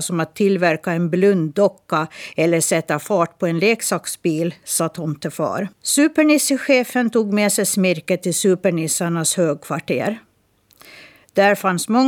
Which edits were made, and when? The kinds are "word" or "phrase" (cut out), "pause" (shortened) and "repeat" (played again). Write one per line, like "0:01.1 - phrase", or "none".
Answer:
0:05.7 - pause